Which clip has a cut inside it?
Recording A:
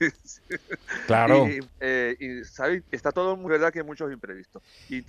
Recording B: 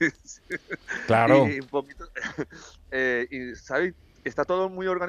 A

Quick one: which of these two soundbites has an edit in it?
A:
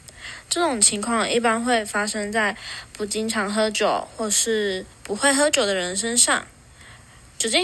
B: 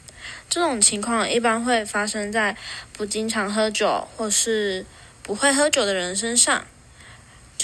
A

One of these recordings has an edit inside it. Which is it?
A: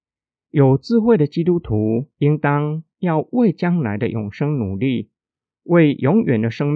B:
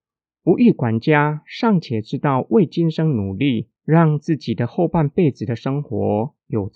B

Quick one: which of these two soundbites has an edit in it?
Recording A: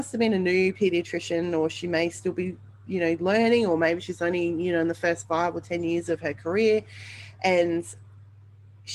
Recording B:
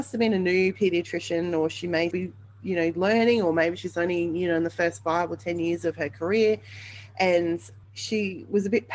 B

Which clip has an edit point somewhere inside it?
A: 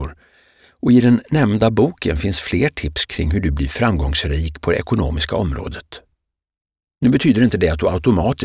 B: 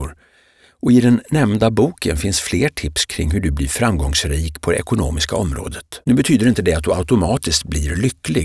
B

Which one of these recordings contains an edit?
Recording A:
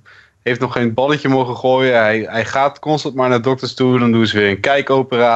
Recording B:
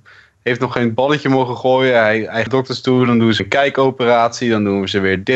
B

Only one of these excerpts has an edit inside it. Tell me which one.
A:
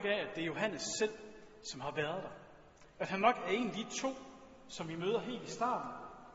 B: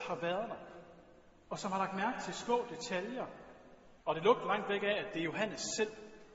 B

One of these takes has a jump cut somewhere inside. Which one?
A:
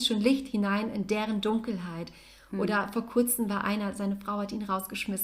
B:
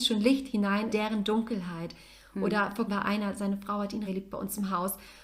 B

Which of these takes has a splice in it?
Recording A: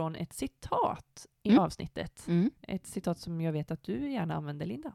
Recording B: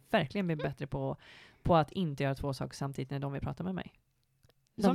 A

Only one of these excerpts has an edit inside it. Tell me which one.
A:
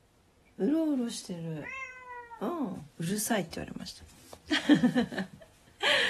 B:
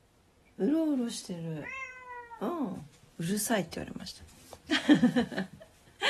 A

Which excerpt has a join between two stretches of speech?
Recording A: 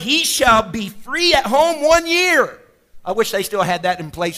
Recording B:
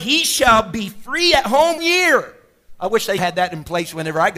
B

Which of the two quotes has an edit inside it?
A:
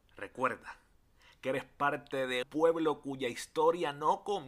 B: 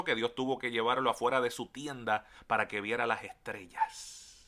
A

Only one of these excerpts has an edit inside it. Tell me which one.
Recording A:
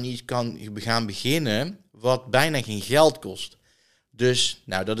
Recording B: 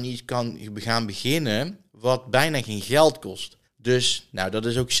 B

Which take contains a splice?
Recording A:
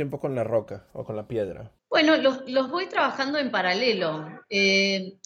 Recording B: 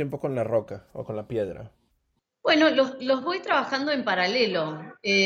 A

